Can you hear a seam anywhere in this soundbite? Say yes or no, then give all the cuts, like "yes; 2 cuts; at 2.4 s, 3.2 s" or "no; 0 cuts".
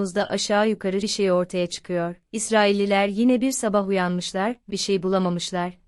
yes; 3 cuts; at 1.0 s, 2.2 s, 4.7 s